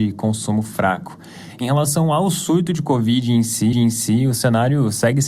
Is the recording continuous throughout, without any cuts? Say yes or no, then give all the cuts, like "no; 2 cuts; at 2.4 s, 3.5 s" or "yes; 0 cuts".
no; 1 cut; at 3.7 s